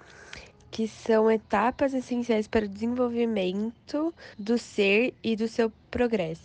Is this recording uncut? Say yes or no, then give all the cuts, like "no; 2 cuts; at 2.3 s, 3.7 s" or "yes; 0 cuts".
no; 1 cut; at 4.3 s